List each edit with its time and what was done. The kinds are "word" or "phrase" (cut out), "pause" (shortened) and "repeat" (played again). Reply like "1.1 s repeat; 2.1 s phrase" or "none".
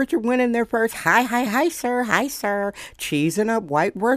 1.5 s word